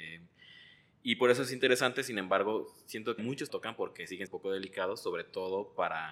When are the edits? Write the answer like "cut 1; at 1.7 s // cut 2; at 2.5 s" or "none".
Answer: cut 1; at 3.2 s // cut 2; at 3.5 s // cut 3; at 4.3 s